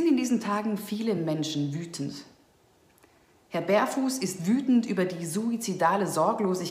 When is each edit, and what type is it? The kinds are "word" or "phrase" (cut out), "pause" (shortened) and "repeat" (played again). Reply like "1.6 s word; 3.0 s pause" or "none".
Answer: none